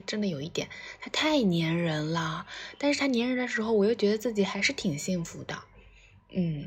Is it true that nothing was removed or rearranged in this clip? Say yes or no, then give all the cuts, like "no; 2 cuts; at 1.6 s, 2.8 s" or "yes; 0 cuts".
yes; 0 cuts